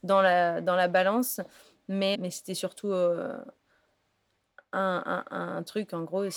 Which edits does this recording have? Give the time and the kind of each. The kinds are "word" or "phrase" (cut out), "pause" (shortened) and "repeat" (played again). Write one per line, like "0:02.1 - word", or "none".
0:02.1 - word